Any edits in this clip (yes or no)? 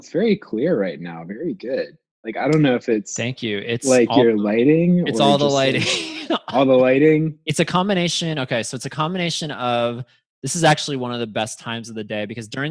no